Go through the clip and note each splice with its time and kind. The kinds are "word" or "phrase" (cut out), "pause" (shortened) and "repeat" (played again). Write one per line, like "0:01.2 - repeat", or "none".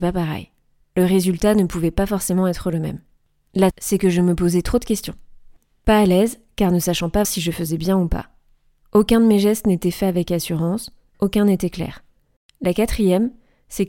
0:03.7 - word
0:07.2 - word
0:11.1 - word